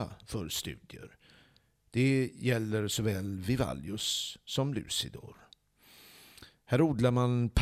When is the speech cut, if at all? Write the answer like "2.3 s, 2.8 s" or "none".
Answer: none